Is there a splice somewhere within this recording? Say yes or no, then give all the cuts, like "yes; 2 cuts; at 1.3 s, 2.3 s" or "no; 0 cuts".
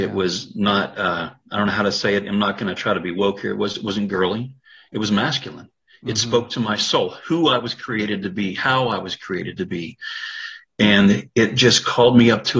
no; 0 cuts